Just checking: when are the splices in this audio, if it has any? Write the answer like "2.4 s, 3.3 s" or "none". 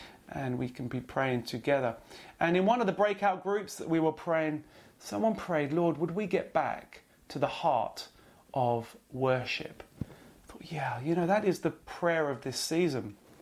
none

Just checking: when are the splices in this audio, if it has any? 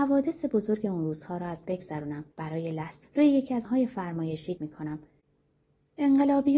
1.6 s, 2.3 s, 3.0 s, 3.6 s, 4.6 s

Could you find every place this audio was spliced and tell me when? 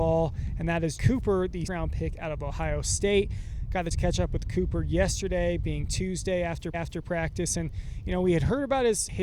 1.0 s, 1.7 s, 3.9 s, 6.7 s

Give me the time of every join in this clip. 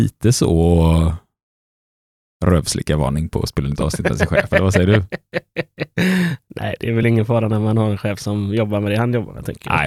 none

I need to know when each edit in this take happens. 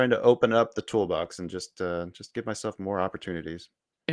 none

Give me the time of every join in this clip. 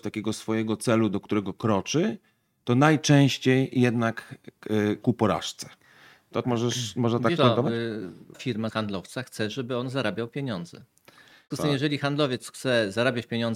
5.0 s, 6.4 s, 7.4 s, 8.3 s, 8.7 s, 11.5 s

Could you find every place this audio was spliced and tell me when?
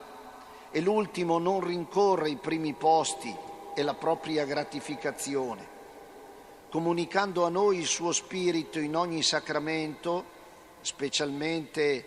none

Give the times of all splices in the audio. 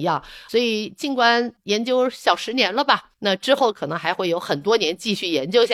3.1 s

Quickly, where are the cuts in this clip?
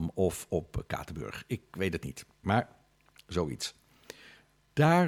none

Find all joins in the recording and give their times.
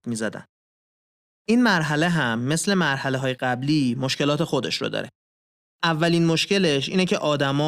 none

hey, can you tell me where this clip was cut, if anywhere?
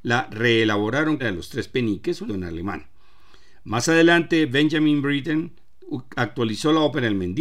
1.2 s, 2.3 s

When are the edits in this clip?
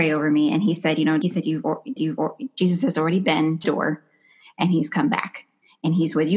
1.2 s, 2.0 s, 3.6 s

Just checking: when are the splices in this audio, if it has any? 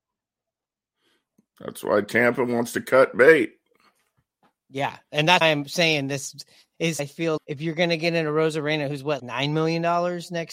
5.4 s, 7.0 s, 7.4 s, 9.2 s

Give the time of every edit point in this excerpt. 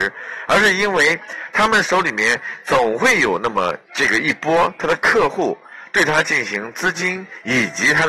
3.8 s

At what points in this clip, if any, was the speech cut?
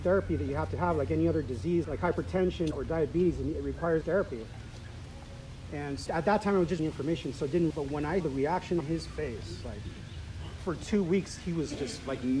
1.8 s, 2.7 s, 4.0 s, 6.1 s, 6.8 s, 7.7 s, 8.2 s, 8.8 s, 10.6 s

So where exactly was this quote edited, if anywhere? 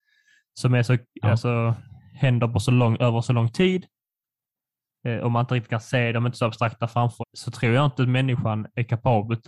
7.2 s

